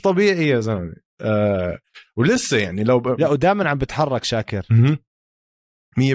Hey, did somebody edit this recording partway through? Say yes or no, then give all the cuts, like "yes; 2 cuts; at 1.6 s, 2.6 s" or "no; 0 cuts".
no; 0 cuts